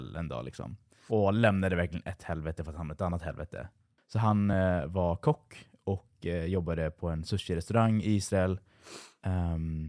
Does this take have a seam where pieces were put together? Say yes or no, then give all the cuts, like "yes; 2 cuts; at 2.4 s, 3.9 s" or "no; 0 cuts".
no; 0 cuts